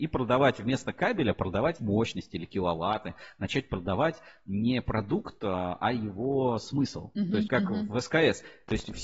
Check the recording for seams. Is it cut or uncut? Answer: cut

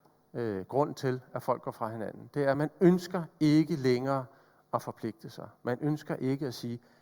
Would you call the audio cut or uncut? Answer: uncut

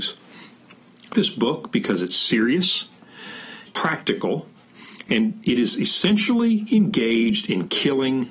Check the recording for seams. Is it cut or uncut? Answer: cut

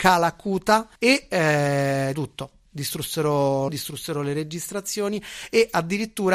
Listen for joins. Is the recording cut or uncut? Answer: cut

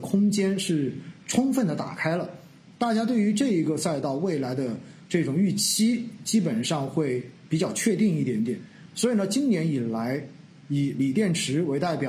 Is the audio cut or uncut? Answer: uncut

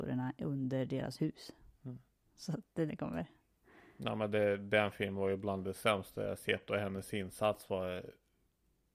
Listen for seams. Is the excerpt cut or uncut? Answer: cut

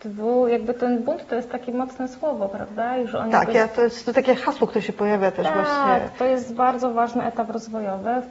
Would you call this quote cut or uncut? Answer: uncut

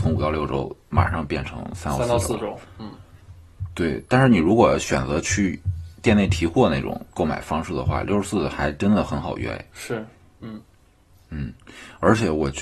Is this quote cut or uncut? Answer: uncut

